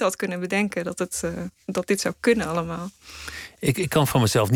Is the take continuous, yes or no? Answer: yes